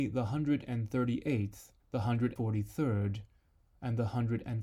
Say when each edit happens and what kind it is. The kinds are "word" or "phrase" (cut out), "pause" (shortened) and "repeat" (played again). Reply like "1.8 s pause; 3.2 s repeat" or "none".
1.8 s pause; 2.4 s word